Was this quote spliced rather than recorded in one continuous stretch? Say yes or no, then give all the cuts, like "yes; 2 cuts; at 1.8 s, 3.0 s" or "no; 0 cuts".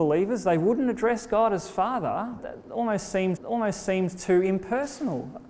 yes; 2 cuts; at 2.4 s, 3.4 s